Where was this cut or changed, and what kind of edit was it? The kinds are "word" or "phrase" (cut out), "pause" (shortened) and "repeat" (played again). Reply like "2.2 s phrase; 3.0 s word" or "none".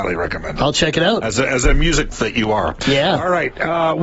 2.1 s word